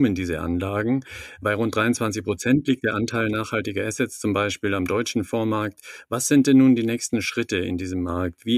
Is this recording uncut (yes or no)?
yes